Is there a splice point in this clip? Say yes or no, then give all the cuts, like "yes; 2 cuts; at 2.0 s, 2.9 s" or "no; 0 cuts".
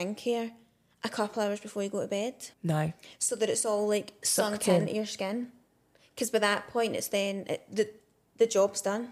yes; 1 cut; at 2.5 s